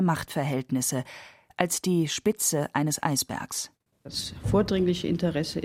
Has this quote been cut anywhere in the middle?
no; 0 cuts

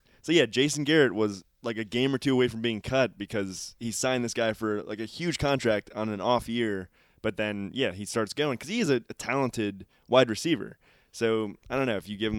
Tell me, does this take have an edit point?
no; 0 cuts

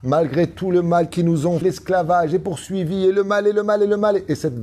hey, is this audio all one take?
no; 1 cut; at 1.6 s

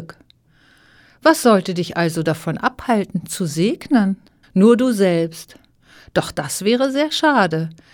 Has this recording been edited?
yes; 1 cut; at 4.4 s

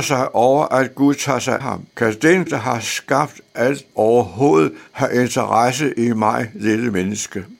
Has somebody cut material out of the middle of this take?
yes; 5 cuts; at 1.6 s, 1.9 s, 2.5 s, 3.9 s, 4.9 s

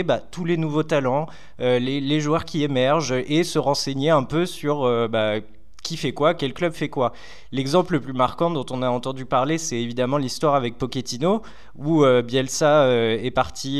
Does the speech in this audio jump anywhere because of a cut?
no; 0 cuts

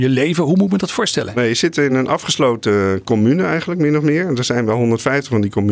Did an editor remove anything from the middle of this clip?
no; 0 cuts

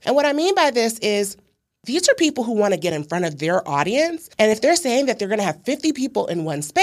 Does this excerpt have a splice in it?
no; 0 cuts

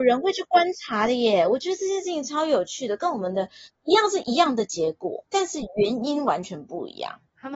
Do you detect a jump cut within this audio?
no; 0 cuts

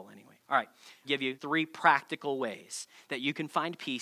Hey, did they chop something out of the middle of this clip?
yes; 2 cuts; at 1.0 s, 1.4 s

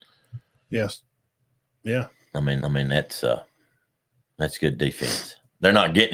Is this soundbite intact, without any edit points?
no; 1 cut; at 2.6 s

